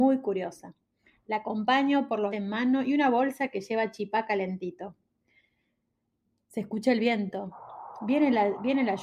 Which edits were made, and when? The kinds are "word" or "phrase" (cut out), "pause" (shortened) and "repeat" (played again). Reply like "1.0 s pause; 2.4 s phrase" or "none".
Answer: 2.3 s phrase